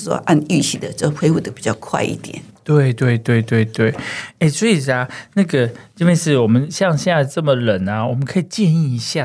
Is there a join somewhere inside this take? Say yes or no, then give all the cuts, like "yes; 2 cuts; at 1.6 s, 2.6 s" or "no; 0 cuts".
no; 0 cuts